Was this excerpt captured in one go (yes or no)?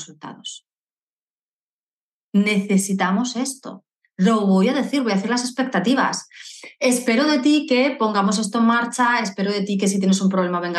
yes